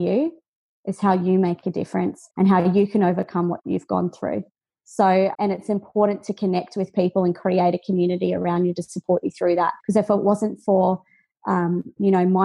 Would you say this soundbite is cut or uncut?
cut